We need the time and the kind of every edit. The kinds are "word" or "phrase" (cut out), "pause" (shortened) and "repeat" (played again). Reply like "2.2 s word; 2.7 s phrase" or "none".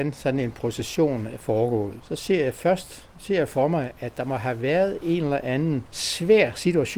none